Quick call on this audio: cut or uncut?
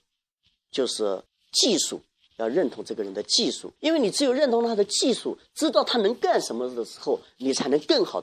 cut